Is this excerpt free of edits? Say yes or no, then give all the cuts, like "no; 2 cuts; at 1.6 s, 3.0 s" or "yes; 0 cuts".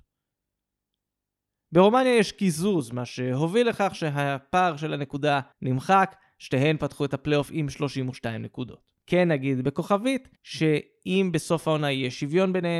no; 3 cuts; at 5.5 s, 9.0 s, 10.4 s